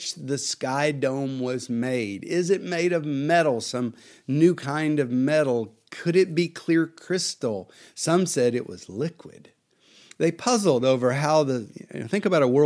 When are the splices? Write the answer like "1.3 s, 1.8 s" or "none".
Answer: none